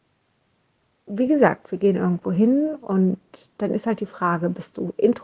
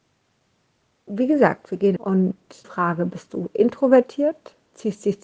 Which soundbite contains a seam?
second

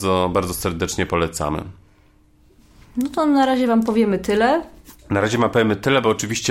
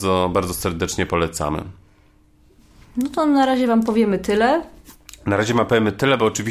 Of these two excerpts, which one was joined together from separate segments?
first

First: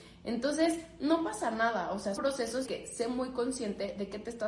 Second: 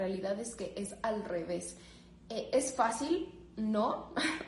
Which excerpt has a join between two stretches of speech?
first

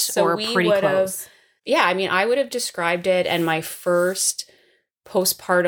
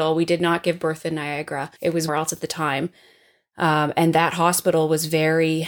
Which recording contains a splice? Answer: second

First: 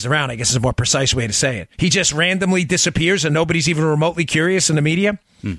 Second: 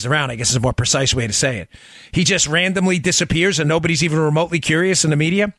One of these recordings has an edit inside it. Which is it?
first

